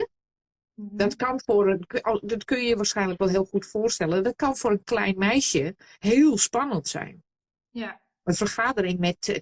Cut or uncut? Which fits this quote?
uncut